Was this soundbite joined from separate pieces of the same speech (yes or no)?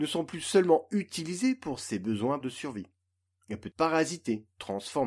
yes